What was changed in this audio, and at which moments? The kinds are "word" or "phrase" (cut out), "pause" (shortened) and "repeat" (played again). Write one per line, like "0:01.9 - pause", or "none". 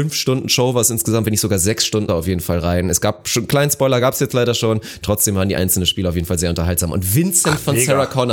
0:02.1 - phrase